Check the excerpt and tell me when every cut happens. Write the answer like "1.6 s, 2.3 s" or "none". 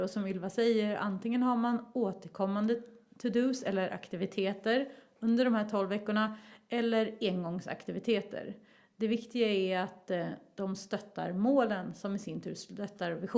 none